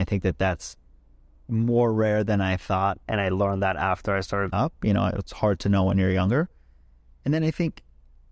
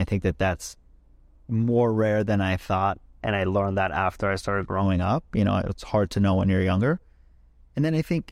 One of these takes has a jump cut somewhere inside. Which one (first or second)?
first